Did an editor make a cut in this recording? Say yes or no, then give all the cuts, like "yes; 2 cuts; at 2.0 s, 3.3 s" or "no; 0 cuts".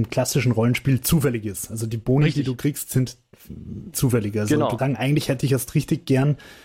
yes; 2 cuts; at 3.9 s, 4.8 s